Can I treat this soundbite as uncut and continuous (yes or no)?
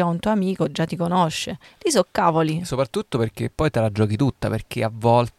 no